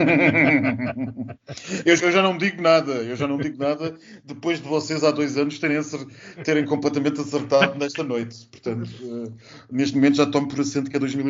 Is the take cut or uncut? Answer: cut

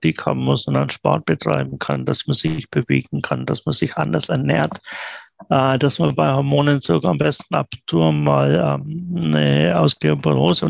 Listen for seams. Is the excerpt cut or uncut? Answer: uncut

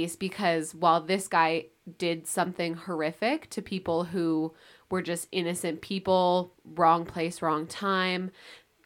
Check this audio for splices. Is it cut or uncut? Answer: uncut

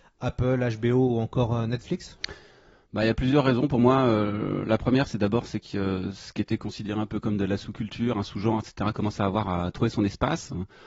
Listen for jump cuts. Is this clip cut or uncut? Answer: uncut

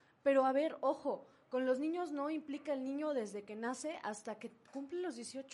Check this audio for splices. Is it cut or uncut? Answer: uncut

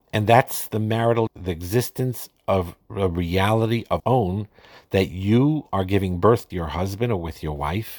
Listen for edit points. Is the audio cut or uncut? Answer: cut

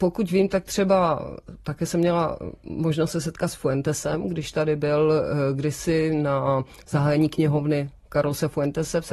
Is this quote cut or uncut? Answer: uncut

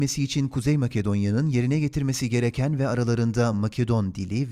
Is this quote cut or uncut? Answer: uncut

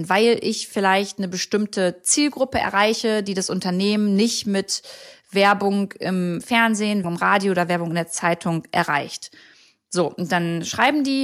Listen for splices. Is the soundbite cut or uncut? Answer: cut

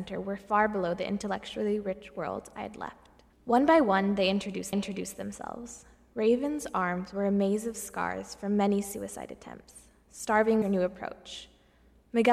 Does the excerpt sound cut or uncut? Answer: cut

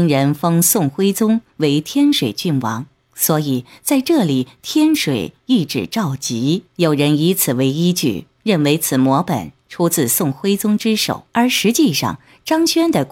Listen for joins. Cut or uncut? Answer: cut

